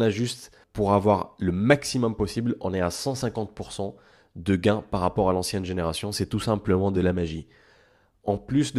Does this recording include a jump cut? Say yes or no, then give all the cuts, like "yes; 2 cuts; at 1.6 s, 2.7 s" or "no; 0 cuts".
no; 0 cuts